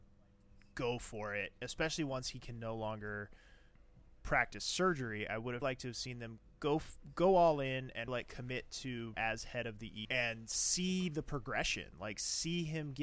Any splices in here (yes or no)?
yes